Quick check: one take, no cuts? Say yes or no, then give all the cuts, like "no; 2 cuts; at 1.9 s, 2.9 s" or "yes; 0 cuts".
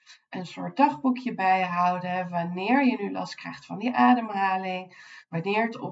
yes; 0 cuts